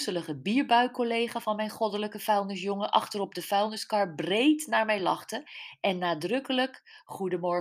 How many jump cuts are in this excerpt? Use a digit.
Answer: 0